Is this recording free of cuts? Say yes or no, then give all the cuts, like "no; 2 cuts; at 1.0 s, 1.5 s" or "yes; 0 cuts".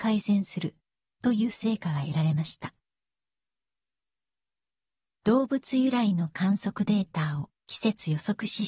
yes; 0 cuts